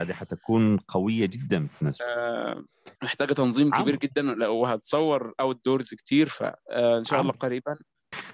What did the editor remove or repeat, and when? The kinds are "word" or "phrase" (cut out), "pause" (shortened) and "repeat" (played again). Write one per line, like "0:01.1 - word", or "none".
0:02.9 - pause
0:06.6 - pause